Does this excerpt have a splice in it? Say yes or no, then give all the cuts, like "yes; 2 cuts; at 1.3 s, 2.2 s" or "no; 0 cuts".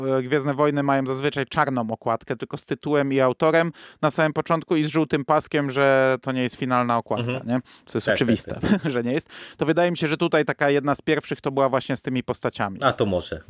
no; 0 cuts